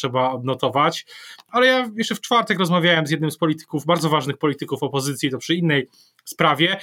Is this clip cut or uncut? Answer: uncut